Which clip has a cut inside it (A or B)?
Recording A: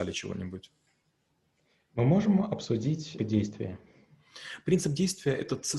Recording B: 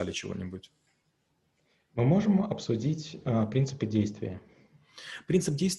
A